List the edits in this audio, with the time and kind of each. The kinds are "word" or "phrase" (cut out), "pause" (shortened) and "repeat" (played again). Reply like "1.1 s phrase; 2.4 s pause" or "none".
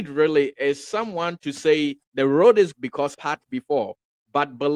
2.0 s pause; 2.7 s phrase; 3.1 s phrase